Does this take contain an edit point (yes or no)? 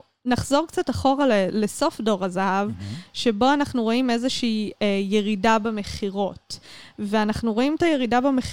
no